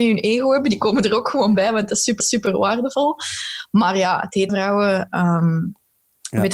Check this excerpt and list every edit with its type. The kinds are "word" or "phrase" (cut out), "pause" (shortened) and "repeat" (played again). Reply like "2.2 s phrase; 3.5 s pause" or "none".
2.2 s repeat; 4.5 s word